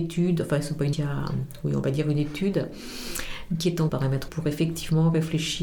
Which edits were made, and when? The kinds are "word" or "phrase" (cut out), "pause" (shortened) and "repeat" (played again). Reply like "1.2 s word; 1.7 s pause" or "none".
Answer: 0.9 s word; 3.9 s word; 4.3 s word